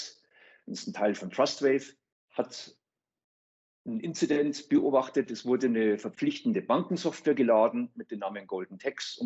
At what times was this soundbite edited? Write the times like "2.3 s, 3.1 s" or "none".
2.1 s